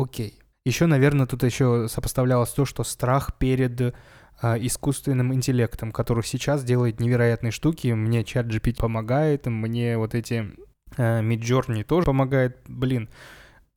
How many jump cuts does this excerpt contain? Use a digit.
2